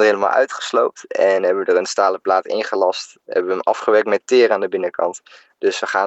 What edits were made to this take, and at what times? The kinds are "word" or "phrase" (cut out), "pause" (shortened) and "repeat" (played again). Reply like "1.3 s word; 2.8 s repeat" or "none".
none